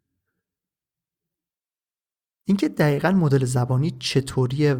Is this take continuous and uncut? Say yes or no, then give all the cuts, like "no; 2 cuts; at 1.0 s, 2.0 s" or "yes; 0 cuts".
yes; 0 cuts